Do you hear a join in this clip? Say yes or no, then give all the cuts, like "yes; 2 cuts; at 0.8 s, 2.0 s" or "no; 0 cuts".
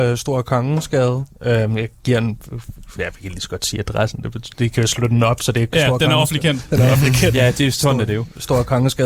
no; 0 cuts